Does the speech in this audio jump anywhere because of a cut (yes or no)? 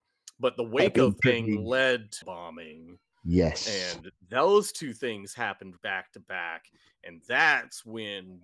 yes